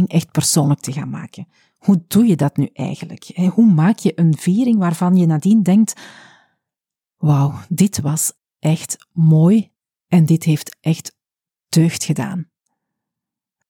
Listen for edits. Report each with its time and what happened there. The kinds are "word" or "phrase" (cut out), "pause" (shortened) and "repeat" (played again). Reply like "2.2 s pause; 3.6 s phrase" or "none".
none